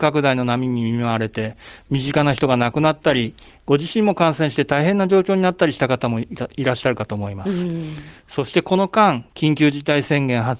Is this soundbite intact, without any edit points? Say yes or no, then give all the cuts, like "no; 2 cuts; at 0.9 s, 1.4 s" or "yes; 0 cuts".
yes; 0 cuts